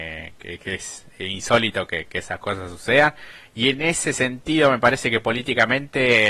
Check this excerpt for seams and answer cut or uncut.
uncut